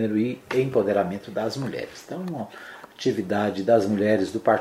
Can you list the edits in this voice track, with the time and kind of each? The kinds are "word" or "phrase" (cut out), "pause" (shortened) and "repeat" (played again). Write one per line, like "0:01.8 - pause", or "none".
none

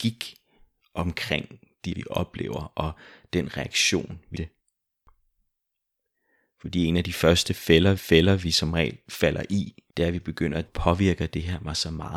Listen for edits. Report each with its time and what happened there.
0:01.9 - word
0:04.3 - phrase
0:08.0 - repeat
0:09.9 - pause
0:10.7 - phrase

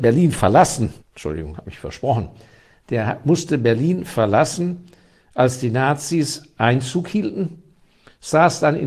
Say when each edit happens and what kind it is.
0:01.0 - pause

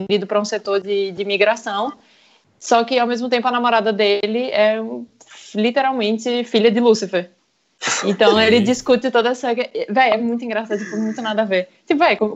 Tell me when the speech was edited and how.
none

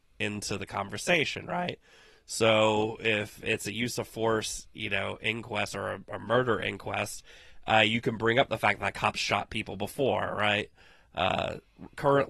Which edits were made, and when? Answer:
none

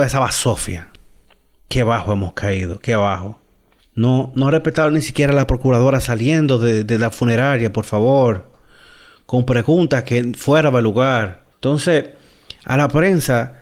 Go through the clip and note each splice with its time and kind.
0:03.8 - pause
0:11.5 - pause

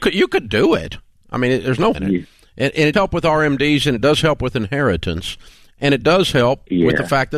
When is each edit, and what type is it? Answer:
0:01.9 - word
0:02.9 - word

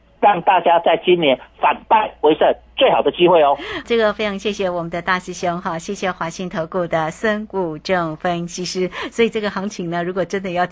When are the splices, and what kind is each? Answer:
0:03.8 - word

